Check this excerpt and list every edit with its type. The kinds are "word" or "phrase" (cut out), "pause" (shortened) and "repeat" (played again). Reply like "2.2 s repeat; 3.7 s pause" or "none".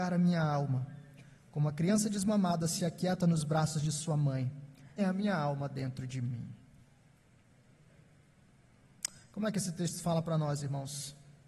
5.0 s word